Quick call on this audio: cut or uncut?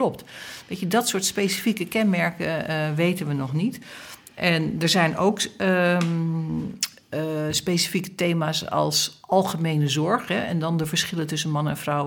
uncut